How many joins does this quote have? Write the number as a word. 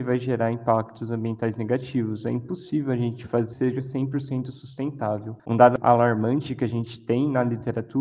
two